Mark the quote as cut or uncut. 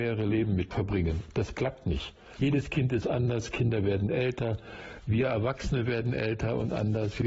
cut